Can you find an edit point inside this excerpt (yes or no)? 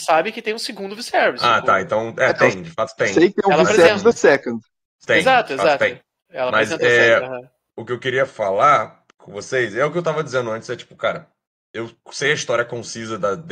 no